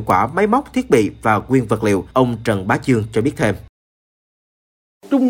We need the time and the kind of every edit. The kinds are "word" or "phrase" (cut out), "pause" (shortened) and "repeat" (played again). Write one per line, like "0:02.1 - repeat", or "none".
0:02.1 - pause